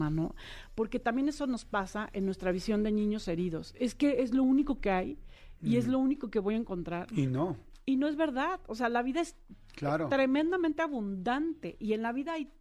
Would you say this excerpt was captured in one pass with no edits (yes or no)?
yes